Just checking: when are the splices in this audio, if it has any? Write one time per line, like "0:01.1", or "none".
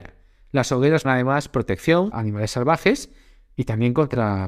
0:01.0
0:02.1